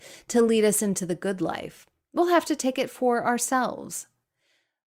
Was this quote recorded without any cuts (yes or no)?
yes